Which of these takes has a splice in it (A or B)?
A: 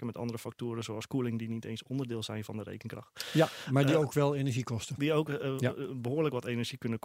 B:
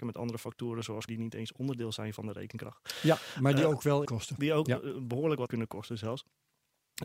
B